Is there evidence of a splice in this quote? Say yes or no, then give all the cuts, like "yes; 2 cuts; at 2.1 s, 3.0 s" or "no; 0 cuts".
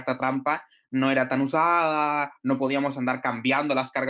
no; 0 cuts